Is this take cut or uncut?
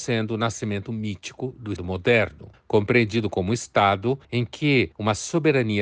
cut